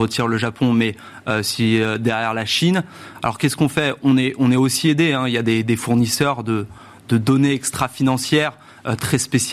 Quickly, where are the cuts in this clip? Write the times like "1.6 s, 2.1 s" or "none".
none